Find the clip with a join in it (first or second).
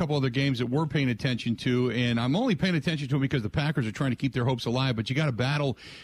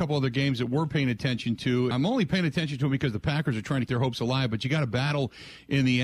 second